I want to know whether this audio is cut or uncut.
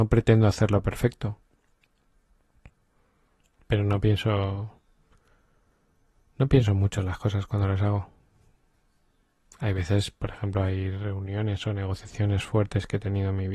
uncut